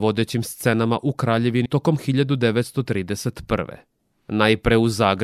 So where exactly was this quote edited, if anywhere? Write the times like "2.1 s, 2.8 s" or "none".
1.7 s, 4.0 s

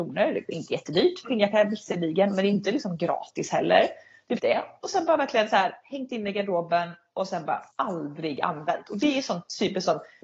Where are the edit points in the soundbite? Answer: 1.2 s, 4.4 s, 7.7 s

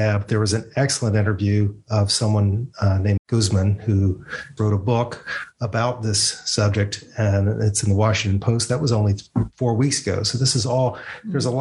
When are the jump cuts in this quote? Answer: 3.2 s, 4.6 s

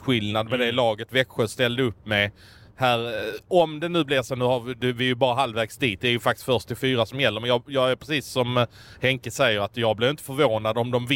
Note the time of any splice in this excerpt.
none

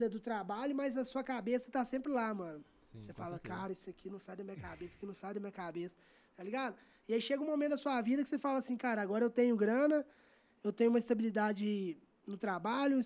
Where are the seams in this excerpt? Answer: none

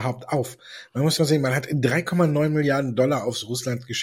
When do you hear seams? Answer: 1.2 s

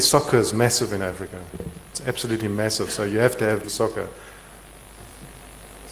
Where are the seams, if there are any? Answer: 3.6 s

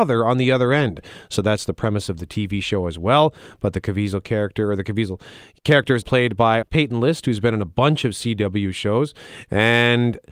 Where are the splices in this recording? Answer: 6.0 s, 6.6 s

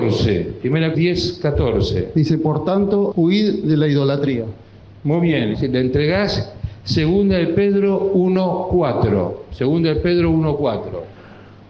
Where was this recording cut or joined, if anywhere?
0.9 s, 3.1 s, 5.0 s, 5.5 s

